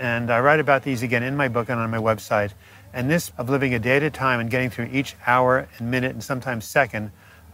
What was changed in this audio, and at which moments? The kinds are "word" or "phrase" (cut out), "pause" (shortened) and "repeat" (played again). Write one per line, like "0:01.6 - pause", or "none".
0:03.3 - word